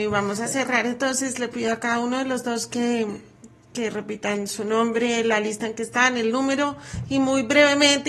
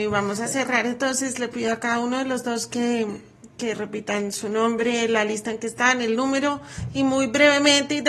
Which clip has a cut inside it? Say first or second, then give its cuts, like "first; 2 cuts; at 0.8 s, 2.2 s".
second; 1 cut; at 3.5 s